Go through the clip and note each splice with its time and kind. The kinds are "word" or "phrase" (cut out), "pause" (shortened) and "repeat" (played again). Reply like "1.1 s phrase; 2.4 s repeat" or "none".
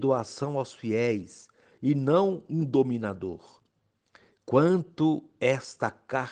none

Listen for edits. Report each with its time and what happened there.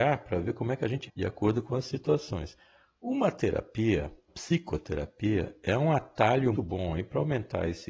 1.0 s word; 4.3 s word; 6.5 s word

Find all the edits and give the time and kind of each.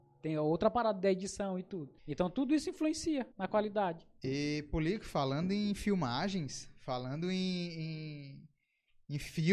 2.0 s pause; 3.3 s pause

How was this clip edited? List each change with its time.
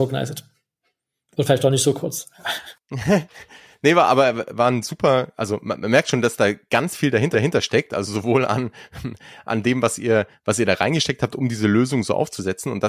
7.3 s repeat

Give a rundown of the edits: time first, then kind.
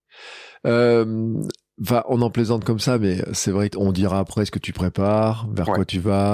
3.7 s phrase

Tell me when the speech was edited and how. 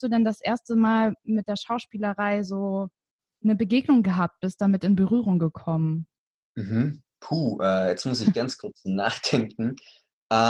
none

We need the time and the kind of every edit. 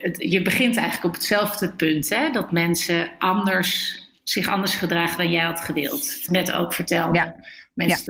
6.3 s phrase

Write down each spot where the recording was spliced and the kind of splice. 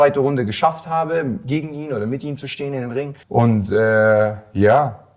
3.2 s pause

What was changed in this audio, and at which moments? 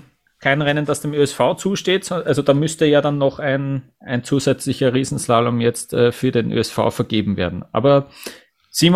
none

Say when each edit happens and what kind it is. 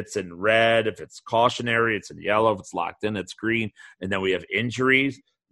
none

